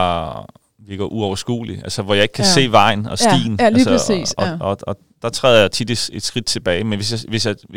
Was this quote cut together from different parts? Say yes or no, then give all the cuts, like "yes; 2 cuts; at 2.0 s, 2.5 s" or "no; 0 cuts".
no; 0 cuts